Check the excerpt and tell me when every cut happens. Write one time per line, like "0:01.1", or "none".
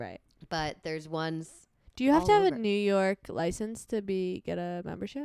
none

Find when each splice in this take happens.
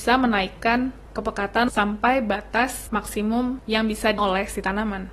0:01.7
0:04.2

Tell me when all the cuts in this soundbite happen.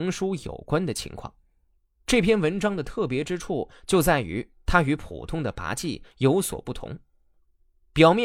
0:01.8

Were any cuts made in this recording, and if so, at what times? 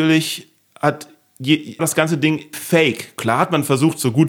0:01.8
0:02.5

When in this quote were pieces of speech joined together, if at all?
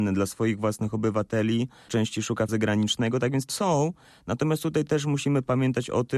0:01.9
0:02.5
0:03.5

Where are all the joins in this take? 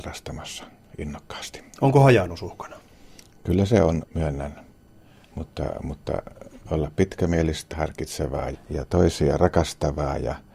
0:04.0
0:06.6
0:07.7
0:08.5

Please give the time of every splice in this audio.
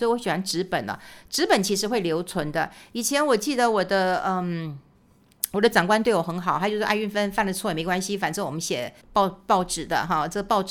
0:09.0

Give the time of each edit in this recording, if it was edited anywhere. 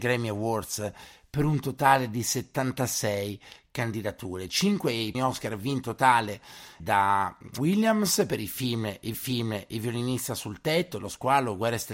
0:05.1
0:05.8
0:06.8
0:07.6
0:09.1

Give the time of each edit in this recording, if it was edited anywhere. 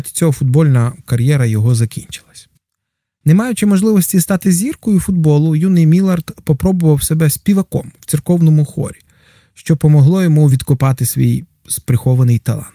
none

